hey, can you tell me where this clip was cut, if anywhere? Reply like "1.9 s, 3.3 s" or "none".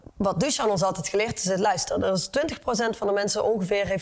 none